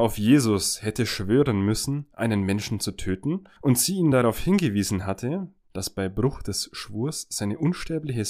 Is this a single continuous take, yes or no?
yes